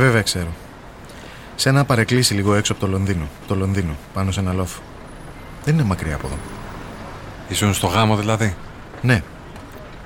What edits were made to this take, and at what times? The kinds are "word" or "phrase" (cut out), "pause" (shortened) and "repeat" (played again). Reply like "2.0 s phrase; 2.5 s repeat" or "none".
3.4 s repeat